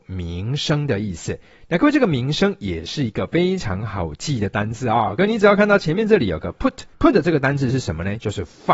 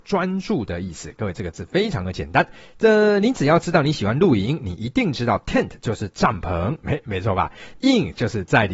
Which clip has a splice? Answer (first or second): first